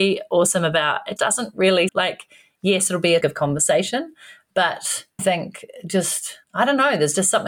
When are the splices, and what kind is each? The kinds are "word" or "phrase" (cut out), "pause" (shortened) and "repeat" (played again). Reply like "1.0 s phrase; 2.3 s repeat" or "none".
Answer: 1.2 s word; 1.9 s phrase; 3.2 s word; 5.2 s word; 6.4 s pause